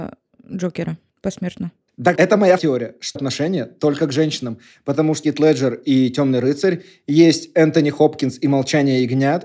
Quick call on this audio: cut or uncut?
cut